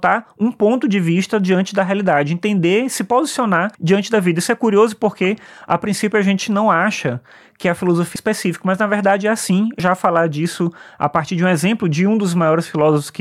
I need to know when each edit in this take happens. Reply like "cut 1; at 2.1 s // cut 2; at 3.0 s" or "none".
cut 1; at 3.7 s // cut 2; at 8.2 s // cut 3; at 9.8 s